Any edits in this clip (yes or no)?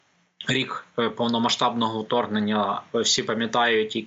no